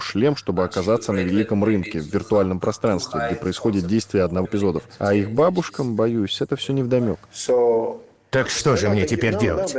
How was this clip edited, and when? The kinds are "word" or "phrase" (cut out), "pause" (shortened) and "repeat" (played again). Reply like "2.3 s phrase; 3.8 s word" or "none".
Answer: 4.4 s word

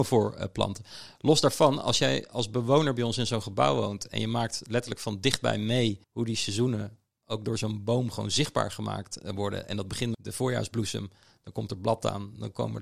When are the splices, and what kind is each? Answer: 6.0 s pause; 10.1 s word

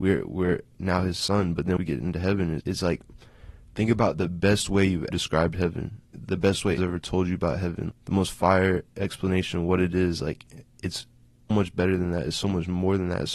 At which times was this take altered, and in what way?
1.8 s word; 2.6 s word; 5.1 s word; 6.1 s word; 6.8 s word; 7.9 s word; 11.5 s word

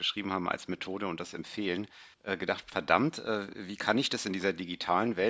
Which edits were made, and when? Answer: 2.1 s pause

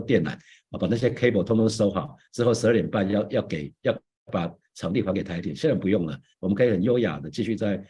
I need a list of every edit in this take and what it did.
none

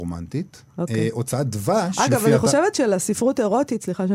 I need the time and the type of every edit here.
none

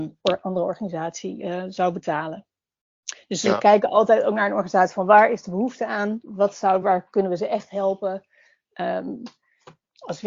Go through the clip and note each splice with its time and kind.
none

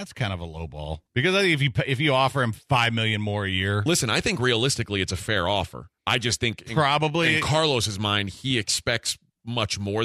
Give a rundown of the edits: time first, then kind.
1.1 s pause; 2.6 s pause; 6.0 s pause

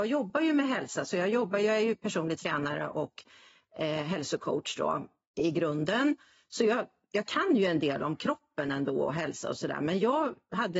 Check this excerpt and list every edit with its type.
none

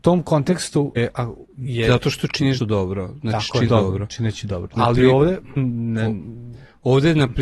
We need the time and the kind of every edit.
1.0 s word; 2.6 s word; 3.7 s word; 4.8 s phrase; 5.6 s word

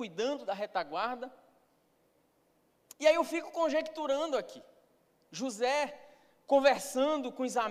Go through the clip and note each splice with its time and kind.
none

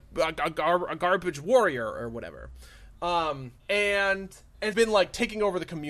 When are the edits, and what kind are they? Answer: 3.6 s pause; 4.7 s phrase

